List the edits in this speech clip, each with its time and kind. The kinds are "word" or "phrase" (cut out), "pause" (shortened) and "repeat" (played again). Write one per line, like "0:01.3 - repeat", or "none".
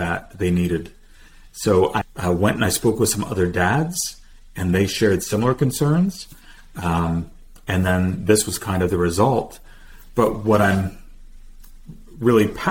0:02.0 - word